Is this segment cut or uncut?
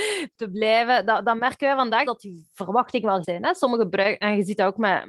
cut